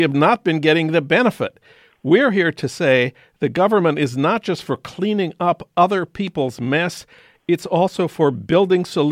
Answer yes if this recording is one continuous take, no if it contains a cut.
yes